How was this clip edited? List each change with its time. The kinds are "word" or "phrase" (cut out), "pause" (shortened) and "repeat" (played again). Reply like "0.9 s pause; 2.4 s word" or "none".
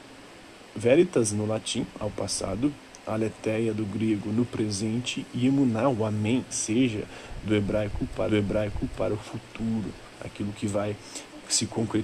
6.5 s word; 8.3 s repeat